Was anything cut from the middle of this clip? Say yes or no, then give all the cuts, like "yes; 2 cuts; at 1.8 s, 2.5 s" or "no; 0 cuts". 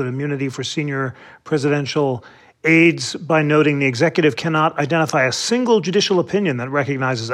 no; 0 cuts